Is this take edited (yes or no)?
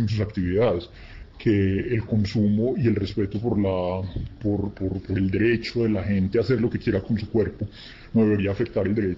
no